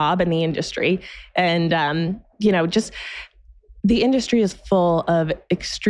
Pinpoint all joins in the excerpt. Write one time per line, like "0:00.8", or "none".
0:02.3